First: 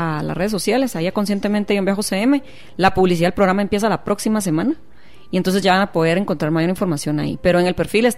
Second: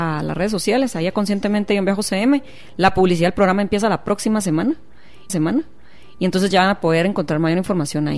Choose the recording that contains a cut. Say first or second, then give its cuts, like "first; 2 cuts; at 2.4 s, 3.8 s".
second; 1 cut; at 5.3 s